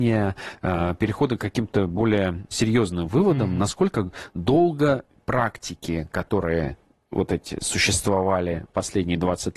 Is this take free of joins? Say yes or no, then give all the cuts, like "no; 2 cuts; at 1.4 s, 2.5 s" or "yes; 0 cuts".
yes; 0 cuts